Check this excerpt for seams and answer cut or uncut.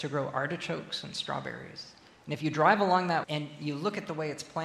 cut